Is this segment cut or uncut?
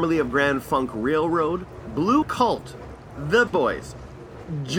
cut